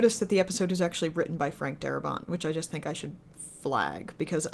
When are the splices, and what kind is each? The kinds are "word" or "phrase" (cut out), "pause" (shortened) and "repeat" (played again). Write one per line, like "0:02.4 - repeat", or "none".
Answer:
none

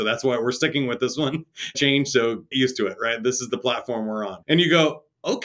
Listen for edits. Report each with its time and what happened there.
0:01.7 - phrase
0:02.5 - word
0:04.4 - pause

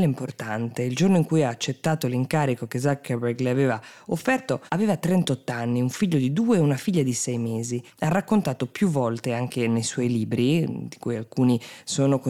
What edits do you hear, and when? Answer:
0:04.7 - pause

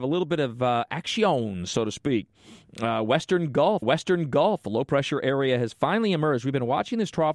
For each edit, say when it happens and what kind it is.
0:03.8 - repeat

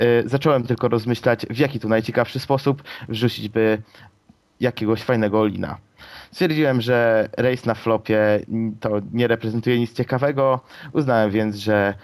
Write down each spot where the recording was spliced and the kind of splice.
none

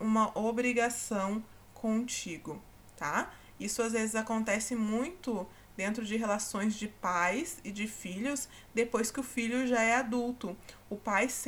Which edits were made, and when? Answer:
none

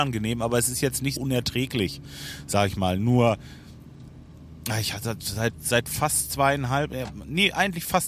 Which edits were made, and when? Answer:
0:01.2 - word
0:05.5 - word

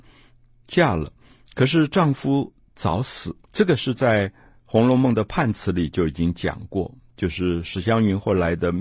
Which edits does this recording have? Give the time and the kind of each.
0:02.6 - pause
0:03.4 - pause

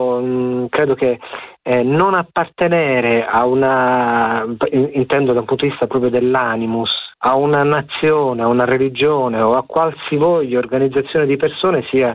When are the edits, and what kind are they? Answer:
0:07.1 - pause

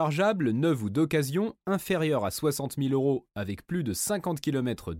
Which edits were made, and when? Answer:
none

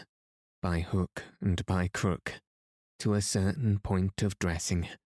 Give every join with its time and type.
none

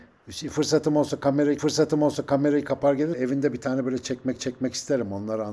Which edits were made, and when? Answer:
0:01.6 - repeat
0:03.1 - word
0:04.4 - repeat

